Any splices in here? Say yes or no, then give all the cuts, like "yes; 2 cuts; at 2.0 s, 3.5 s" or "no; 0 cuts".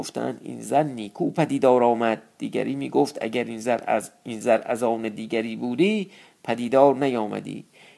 no; 0 cuts